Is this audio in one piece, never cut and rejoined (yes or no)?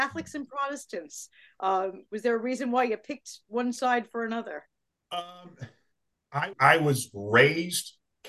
no